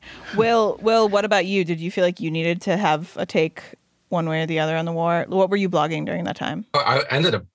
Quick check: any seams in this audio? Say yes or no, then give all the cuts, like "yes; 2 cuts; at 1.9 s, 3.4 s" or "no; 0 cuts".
no; 0 cuts